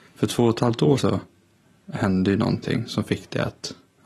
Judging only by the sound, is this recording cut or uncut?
cut